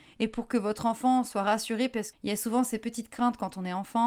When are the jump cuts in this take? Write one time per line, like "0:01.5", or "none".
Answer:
0:02.1